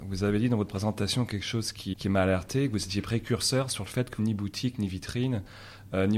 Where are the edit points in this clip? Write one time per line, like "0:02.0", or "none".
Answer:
0:01.9
0:04.2